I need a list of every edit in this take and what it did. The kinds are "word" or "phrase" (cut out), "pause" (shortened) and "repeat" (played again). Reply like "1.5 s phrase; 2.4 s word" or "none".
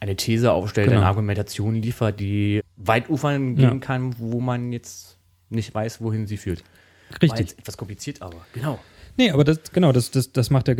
2.6 s word